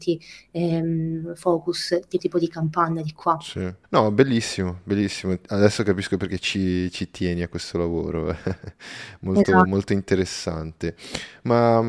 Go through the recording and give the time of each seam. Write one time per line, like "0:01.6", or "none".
0:02.2
0:03.8